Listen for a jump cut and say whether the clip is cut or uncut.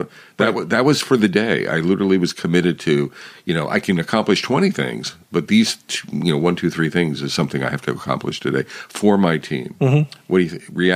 uncut